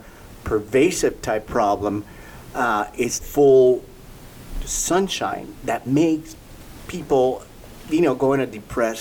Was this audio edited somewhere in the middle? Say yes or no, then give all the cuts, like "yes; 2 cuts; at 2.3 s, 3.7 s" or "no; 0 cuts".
yes; 2 cuts; at 1.4 s, 3.2 s